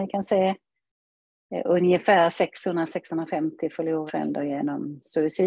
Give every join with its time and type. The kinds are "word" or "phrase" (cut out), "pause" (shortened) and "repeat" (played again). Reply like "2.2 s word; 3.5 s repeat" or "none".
4.1 s word